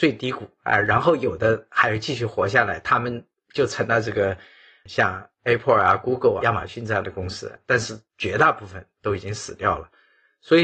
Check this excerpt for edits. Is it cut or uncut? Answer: cut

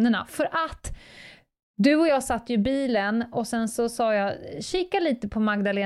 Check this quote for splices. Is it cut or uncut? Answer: uncut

